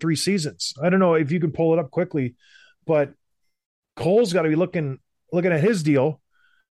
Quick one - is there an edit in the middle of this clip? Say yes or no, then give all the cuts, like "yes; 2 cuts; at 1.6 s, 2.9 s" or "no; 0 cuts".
no; 0 cuts